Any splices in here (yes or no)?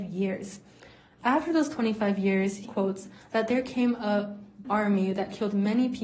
yes